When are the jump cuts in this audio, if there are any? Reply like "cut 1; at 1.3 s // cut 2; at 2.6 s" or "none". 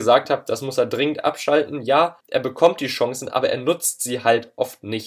cut 1; at 2.2 s